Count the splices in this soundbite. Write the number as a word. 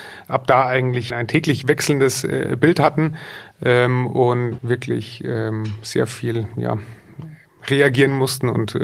two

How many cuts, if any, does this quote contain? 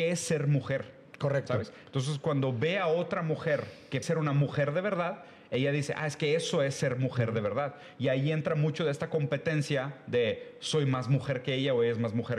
one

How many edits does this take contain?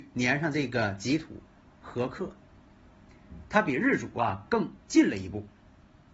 one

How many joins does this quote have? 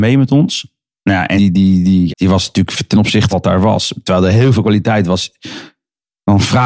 three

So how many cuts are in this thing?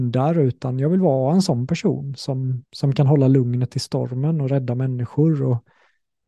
one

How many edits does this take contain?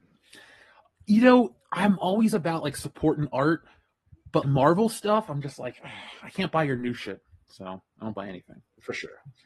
one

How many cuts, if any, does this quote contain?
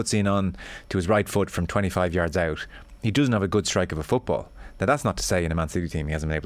zero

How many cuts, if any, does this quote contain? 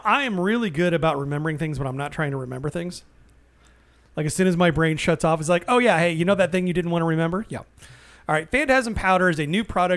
zero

